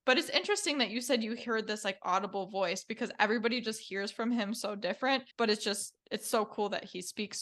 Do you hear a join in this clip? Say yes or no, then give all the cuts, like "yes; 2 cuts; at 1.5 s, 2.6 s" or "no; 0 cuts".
yes; 2 cuts; at 5.3 s, 6.0 s